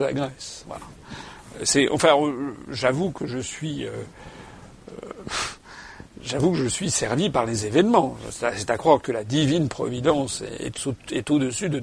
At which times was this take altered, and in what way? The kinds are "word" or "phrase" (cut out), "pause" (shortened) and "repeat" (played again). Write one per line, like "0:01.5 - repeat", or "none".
none